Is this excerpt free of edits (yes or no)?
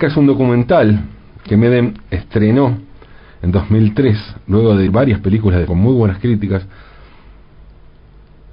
no